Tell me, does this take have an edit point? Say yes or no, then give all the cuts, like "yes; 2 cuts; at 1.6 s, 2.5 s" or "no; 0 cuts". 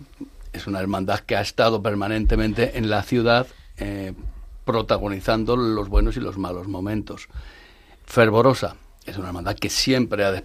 no; 0 cuts